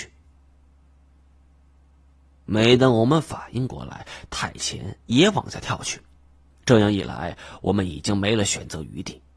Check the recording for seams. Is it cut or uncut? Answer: uncut